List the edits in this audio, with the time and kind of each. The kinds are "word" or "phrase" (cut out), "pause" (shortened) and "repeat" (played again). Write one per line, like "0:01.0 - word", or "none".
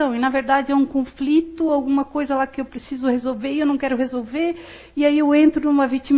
none